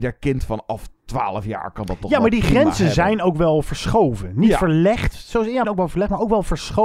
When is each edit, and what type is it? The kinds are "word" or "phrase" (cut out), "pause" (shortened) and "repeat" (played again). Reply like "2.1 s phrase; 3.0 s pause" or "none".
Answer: 5.6 s word